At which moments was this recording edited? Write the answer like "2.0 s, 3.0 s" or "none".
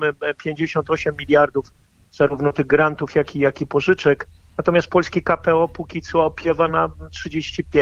none